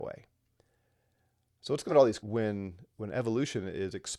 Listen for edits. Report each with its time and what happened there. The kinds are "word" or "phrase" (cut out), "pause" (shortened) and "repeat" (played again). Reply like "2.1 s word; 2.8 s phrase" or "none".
1.9 s word; 2.2 s word